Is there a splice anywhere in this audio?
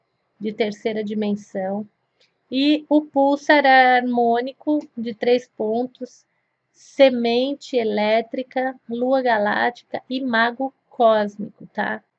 no; 0 cuts

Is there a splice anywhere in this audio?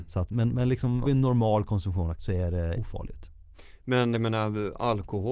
yes; 4 cuts; at 1.0 s, 2.2 s, 2.7 s, 4.1 s

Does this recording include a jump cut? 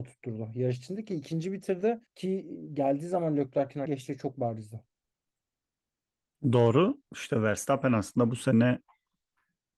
yes; 3 cuts; at 2.1 s, 3.9 s, 7.1 s

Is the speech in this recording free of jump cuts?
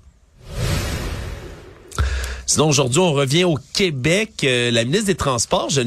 yes; 0 cuts

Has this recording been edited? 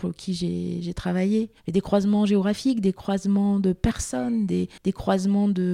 yes; 2 cuts; at 1.6 s, 4.8 s

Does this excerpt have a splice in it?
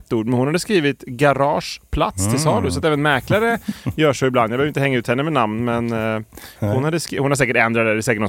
no; 0 cuts

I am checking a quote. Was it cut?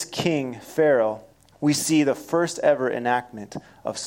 yes; 1 cut; at 1.3 s

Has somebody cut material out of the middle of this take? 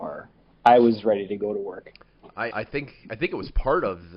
yes; 1 cut; at 2.5 s

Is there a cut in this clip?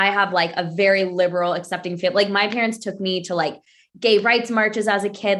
no; 0 cuts

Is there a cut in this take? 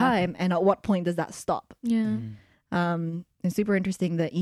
no; 0 cuts

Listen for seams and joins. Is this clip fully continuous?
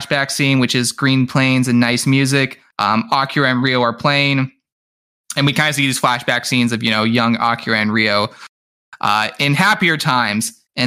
yes; 0 cuts

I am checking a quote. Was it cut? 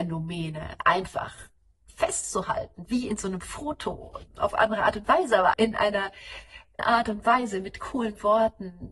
yes; 3 cuts; at 4.3 s, 5.5 s, 6.8 s

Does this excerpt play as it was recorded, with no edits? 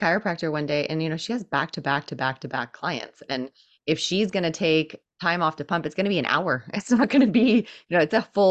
yes; 0 cuts

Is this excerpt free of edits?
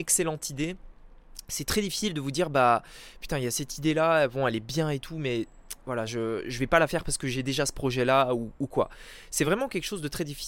yes; 0 cuts

